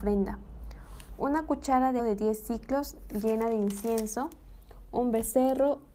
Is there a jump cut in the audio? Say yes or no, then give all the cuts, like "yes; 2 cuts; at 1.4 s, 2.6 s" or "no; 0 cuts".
yes; 1 cut; at 2.0 s